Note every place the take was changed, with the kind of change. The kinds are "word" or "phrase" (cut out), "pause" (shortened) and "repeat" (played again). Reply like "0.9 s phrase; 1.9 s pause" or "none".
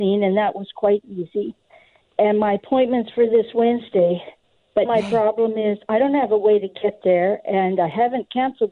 4.9 s word

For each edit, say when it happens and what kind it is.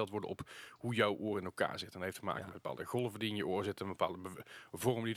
none

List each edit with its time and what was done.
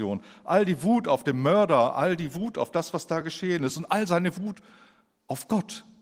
none

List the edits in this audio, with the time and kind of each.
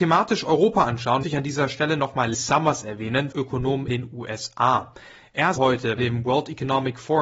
1.2 s word; 2.3 s word; 3.3 s word; 3.9 s word; 5.6 s word; 6.0 s word

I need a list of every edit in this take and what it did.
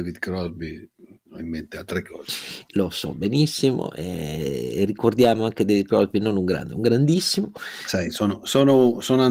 none

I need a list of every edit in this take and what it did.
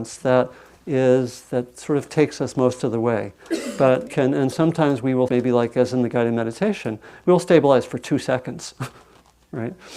4.1 s word; 4.5 s word; 5.3 s word

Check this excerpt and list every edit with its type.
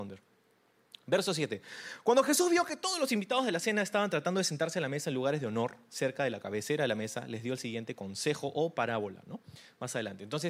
none

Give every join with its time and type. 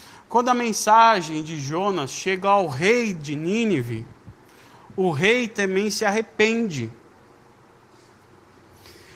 none

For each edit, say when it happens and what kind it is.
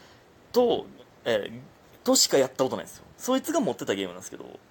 3.1 s pause

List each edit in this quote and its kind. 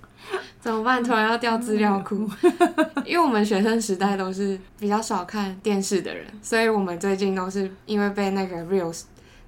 4.7 s pause

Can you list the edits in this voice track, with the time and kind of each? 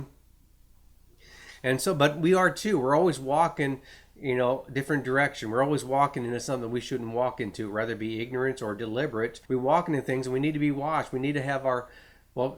9.4 s pause

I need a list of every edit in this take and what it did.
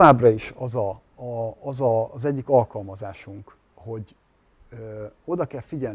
3.6 s pause

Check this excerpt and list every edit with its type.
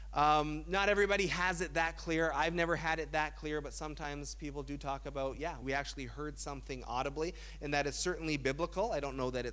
5.6 s word

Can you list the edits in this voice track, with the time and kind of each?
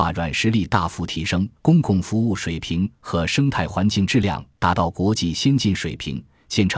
1.6 s pause

